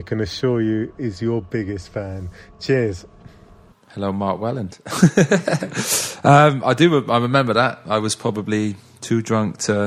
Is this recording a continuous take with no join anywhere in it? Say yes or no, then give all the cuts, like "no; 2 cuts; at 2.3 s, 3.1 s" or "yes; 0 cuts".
no; 1 cut; at 1.5 s